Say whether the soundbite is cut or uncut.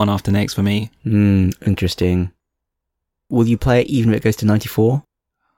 uncut